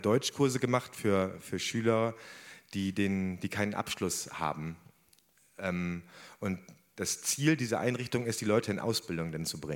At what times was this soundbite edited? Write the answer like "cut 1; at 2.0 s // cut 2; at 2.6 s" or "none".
none

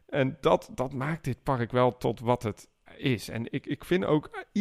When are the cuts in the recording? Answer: cut 1; at 2.9 s

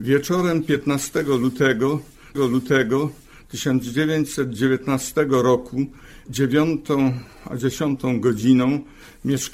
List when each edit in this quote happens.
cut 1; at 2.3 s // cut 2; at 6.3 s

